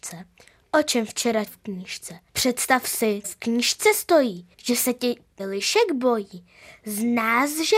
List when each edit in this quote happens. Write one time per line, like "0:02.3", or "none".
0:01.5
0:02.3
0:03.2
0:04.5
0:05.4